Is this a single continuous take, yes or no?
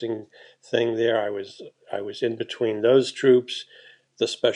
yes